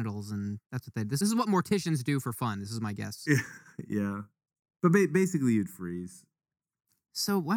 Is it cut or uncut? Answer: cut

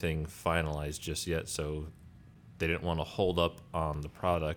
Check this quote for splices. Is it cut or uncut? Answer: uncut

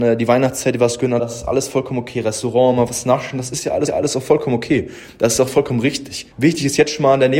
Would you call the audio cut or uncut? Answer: cut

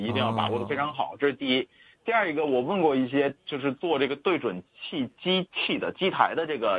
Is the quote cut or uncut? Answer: uncut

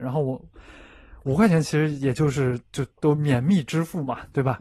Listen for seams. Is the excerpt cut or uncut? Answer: uncut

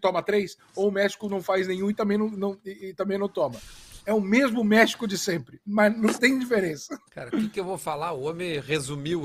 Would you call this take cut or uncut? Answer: cut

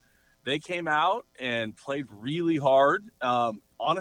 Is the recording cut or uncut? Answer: uncut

